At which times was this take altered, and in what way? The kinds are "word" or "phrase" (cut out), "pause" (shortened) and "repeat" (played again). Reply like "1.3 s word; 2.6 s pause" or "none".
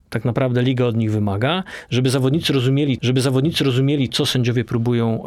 3.0 s repeat